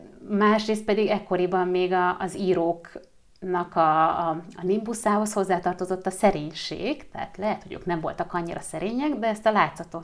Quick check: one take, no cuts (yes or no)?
yes